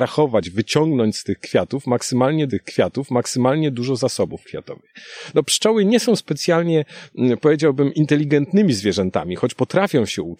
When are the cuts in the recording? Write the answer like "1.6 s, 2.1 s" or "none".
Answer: 2.5 s